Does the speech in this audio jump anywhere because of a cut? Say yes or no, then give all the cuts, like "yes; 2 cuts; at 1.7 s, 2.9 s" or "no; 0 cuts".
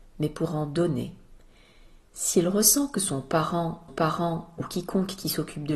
yes; 1 cut; at 3.9 s